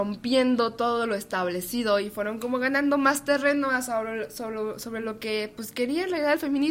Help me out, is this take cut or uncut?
uncut